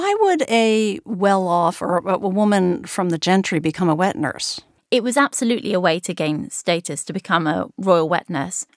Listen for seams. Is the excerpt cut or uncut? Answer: uncut